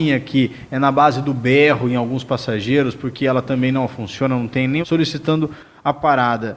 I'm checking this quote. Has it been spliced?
yes; 1 cut; at 4.8 s

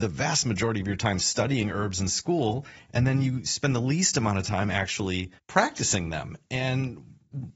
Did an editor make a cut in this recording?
yes; 1 cut; at 5.4 s

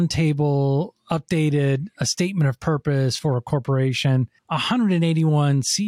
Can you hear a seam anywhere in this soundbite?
yes; 1 cut; at 4.4 s

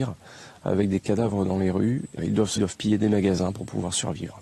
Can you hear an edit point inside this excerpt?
yes; 2 cuts; at 2.2 s, 2.6 s

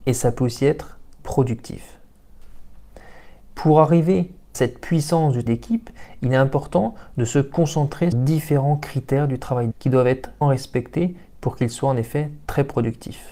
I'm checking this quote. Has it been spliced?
yes; 6 cuts; at 1.2 s, 4.5 s, 5.5 s, 8.1 s, 9.7 s, 10.4 s

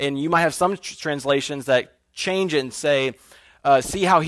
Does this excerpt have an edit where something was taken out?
no; 0 cuts

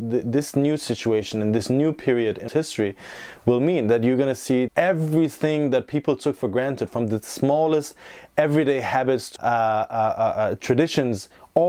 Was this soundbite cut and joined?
yes; 3 cuts; at 2.5 s, 4.7 s, 9.4 s

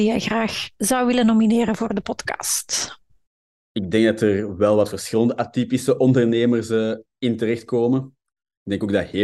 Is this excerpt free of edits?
yes; 0 cuts

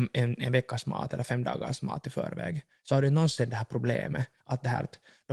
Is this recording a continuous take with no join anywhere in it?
yes; 0 cuts

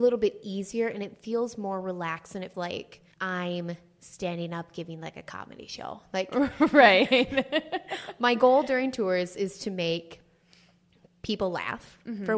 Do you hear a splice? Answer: yes; 2 cuts; at 2.5 s, 3.1 s

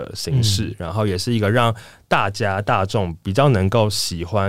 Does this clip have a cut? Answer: no; 0 cuts

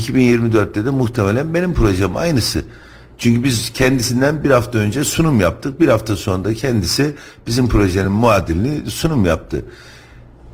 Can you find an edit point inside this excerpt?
no; 0 cuts

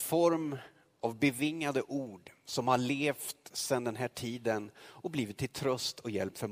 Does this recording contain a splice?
no; 0 cuts

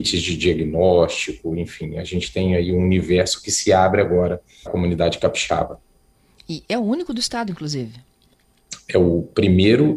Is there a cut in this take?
yes; 1 cut; at 4.7 s

